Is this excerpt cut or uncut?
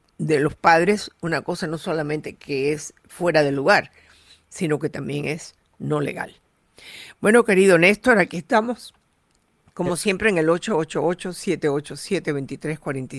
uncut